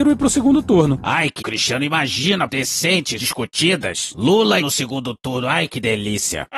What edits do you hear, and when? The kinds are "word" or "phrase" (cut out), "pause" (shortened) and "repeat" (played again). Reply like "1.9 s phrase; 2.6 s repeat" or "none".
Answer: 1.4 s word; 2.5 s word; 3.2 s word; 4.6 s phrase